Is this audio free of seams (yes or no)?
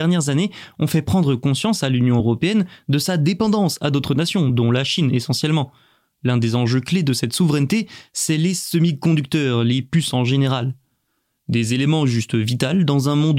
yes